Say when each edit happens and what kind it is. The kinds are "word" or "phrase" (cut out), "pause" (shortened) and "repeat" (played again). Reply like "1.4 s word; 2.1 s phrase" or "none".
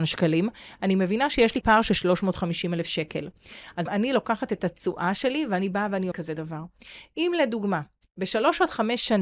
1.6 s word; 3.9 s word; 6.1 s word